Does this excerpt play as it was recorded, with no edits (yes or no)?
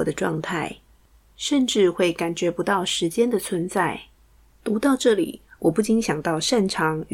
yes